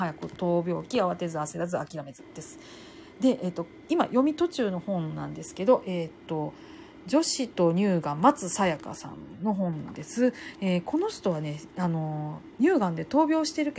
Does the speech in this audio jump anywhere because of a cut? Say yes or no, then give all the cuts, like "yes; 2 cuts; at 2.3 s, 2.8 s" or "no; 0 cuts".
yes; 1 cut; at 12.5 s